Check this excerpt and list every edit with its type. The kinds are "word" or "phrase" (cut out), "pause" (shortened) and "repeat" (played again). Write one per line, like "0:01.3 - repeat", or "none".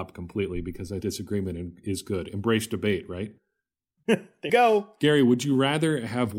0:01.0 - word
0:03.4 - pause
0:04.5 - word